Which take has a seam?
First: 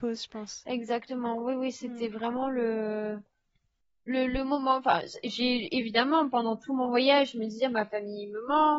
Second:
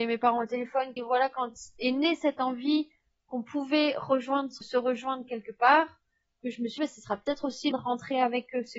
second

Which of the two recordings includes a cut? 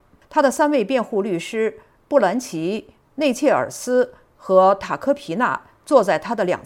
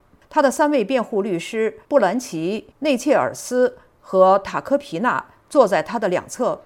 second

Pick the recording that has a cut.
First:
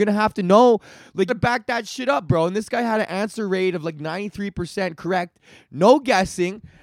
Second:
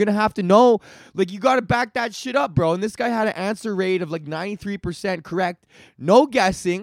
first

